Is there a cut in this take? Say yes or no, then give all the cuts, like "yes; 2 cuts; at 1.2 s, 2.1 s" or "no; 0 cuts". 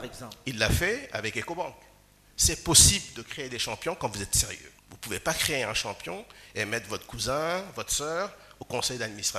yes; 1 cut; at 4.8 s